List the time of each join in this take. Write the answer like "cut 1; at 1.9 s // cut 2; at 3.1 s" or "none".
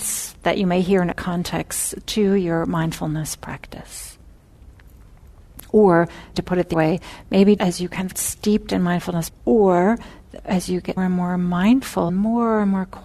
cut 1; at 1.1 s // cut 2; at 6.3 s // cut 3; at 6.7 s // cut 4; at 7.6 s // cut 5; at 8.1 s // cut 6; at 9.3 s // cut 7; at 11.0 s // cut 8; at 12.1 s